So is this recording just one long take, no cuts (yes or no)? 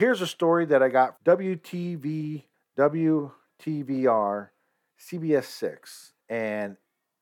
no